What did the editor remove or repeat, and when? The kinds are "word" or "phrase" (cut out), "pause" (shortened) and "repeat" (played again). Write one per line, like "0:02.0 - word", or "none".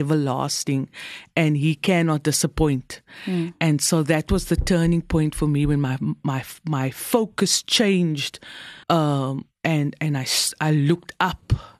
0:08.8 - pause